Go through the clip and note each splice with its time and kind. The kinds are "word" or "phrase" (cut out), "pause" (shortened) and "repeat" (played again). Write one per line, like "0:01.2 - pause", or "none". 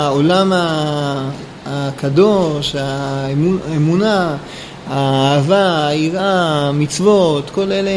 none